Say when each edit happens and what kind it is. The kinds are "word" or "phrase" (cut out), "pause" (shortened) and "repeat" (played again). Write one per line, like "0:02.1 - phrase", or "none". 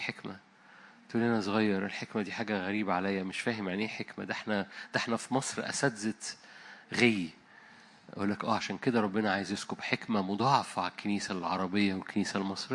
none